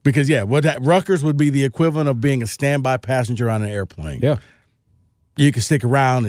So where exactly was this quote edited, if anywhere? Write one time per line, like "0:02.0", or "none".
none